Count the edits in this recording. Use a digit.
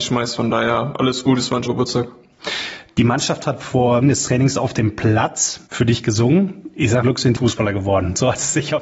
5